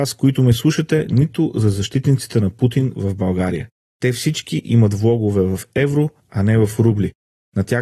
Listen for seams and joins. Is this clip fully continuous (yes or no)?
yes